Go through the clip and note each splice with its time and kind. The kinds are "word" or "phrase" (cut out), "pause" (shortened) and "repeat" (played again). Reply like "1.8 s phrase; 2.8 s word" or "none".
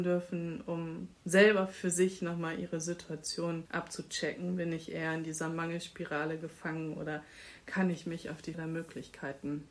1.1 s pause; 3.7 s word; 8.5 s word